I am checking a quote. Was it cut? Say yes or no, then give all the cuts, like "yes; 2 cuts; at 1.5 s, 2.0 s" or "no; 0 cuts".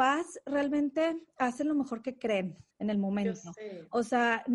yes; 1 cut; at 2.7 s